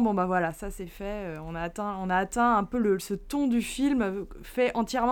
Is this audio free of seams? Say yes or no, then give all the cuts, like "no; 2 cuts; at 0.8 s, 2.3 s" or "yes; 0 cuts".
yes; 0 cuts